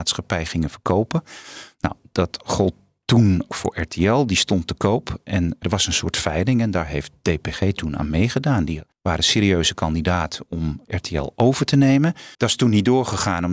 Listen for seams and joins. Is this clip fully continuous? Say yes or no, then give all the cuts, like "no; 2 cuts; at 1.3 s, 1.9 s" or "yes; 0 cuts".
no; 5 cuts; at 3.5 s, 5.6 s, 8.9 s, 10.8 s, 12.3 s